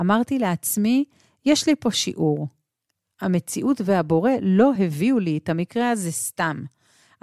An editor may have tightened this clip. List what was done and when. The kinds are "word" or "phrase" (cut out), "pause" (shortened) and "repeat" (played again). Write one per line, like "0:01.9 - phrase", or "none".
none